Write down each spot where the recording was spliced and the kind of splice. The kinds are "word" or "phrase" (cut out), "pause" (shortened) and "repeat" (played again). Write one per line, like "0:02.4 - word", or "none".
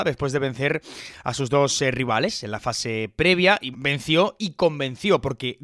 0:03.7 - word